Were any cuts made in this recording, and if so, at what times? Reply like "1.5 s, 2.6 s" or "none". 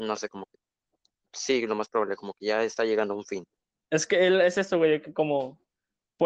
none